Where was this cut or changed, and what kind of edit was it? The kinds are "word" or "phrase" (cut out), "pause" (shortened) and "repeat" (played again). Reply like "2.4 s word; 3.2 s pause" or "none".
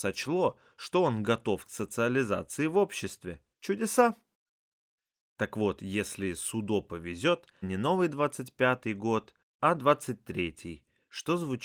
3.5 s pause; 7.6 s phrase